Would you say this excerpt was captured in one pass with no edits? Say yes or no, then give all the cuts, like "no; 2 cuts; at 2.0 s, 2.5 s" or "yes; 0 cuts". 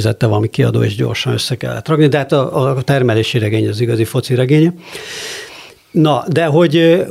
yes; 0 cuts